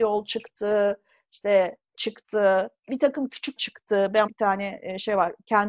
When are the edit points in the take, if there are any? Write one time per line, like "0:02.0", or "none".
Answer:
0:01.9
0:02.8
0:03.6
0:04.3